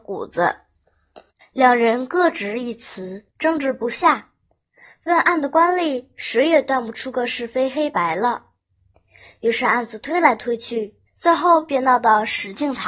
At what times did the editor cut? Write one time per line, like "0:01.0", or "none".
0:01.4
0:03.3
0:11.1